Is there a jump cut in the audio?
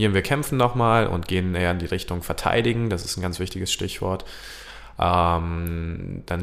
no; 0 cuts

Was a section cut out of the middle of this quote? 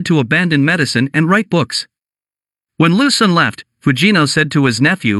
no; 0 cuts

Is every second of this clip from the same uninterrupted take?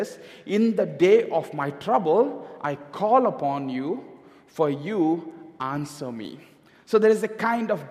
yes; 0 cuts

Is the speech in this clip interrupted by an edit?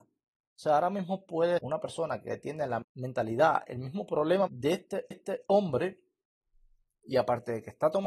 yes; 4 cuts; at 1.6 s, 2.8 s, 4.5 s, 5.1 s

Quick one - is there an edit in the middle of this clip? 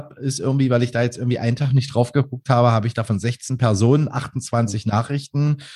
no; 0 cuts

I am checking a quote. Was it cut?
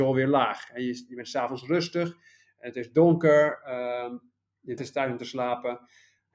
yes; 1 cut; at 4.8 s

